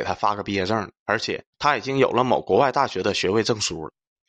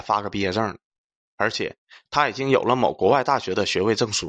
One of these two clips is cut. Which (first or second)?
first